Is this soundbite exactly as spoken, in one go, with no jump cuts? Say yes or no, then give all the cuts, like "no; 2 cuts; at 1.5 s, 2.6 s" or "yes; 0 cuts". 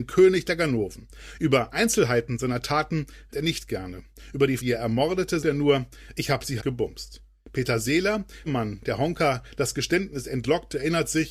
no; 5 cuts; at 3.3 s, 4.6 s, 5.4 s, 6.6 s, 8.5 s